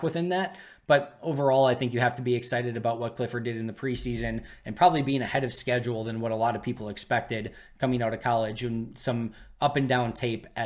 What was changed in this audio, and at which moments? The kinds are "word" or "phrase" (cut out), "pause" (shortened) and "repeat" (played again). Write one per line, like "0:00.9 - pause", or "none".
none